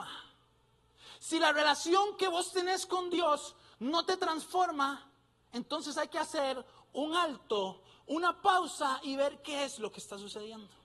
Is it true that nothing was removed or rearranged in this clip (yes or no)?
yes